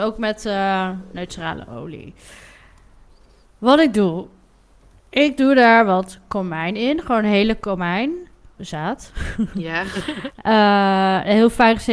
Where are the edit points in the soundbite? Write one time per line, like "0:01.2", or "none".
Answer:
0:08.6